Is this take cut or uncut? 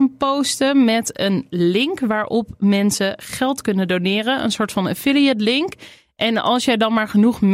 uncut